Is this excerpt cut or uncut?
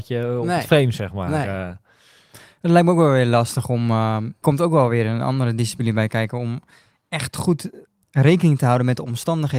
cut